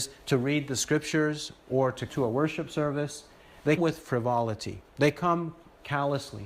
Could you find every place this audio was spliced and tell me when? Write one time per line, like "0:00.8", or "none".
0:02.1
0:03.8
0:04.9